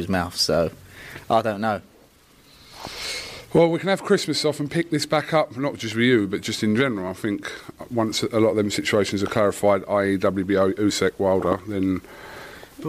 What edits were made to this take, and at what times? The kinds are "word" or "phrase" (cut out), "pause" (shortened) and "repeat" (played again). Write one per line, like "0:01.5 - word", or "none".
none